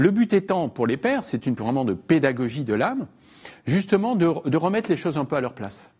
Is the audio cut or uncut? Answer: cut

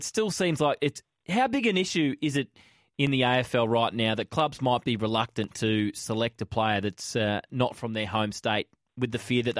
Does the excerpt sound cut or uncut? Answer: uncut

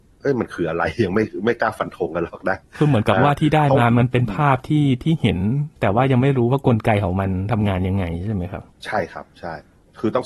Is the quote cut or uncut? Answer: cut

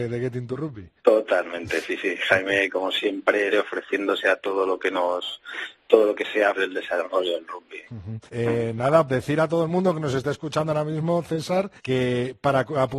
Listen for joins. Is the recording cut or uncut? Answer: cut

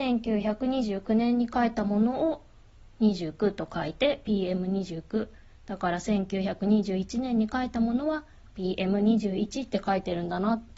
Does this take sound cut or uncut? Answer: uncut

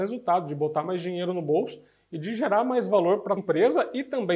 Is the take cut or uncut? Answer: cut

